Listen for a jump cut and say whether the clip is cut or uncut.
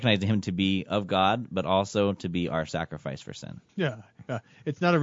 cut